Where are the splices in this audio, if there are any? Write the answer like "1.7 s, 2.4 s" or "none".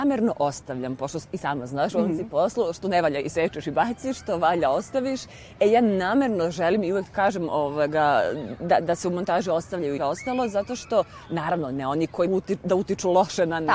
10.0 s, 12.3 s